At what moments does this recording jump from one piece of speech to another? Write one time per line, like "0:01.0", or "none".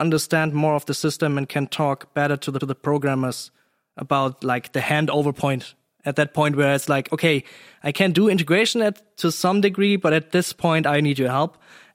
0:02.6